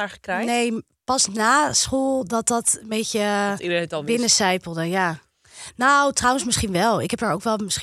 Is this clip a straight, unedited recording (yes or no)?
yes